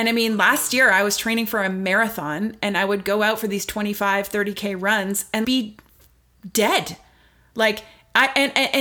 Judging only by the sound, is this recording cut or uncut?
cut